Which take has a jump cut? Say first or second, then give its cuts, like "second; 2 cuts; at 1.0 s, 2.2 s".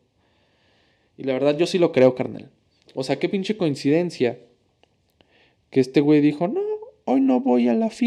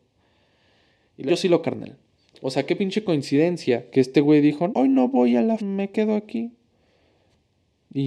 second; 5 cuts; at 1.3 s, 1.6 s, 3.9 s, 4.7 s, 5.6 s